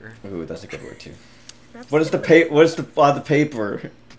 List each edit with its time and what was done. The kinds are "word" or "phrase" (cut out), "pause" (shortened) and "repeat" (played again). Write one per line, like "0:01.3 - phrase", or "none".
none